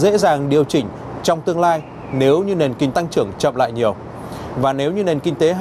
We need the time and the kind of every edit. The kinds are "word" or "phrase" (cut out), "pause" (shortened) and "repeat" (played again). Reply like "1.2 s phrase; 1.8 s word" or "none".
2.9 s word